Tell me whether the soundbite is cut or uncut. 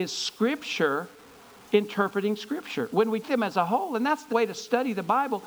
cut